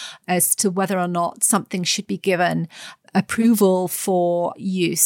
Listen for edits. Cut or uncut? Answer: uncut